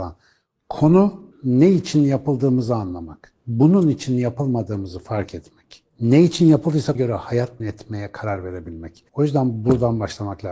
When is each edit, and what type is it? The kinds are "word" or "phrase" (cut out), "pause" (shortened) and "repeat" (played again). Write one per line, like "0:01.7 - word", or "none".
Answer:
0:01.3 - pause
0:05.9 - pause
0:06.9 - word
0:07.6 - word
0:09.1 - pause

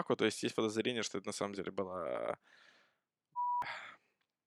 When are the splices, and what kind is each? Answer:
none

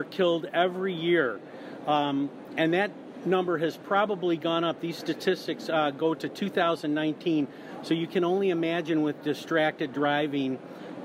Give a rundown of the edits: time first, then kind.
none

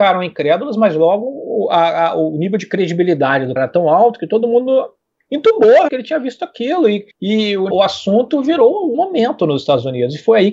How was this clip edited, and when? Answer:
0:03.6 - word
0:05.9 - word
0:07.1 - pause
0:07.7 - word
0:08.9 - phrase

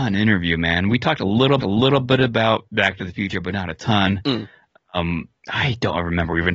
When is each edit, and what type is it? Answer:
0:01.6 - repeat
0:02.7 - pause
0:05.4 - pause

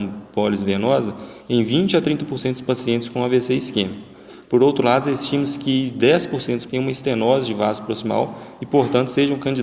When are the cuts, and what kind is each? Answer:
0:06.7 - word

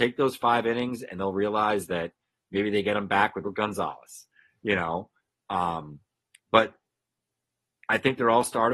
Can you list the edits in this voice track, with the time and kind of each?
0:03.4 - word

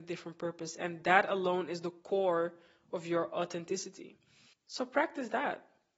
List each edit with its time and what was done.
none

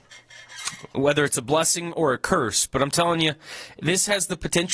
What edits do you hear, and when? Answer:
none

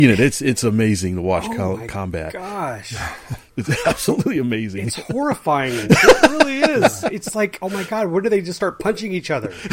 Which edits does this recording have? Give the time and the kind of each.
0:03.5 - pause

